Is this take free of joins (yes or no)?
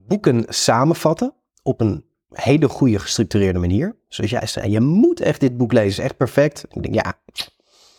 yes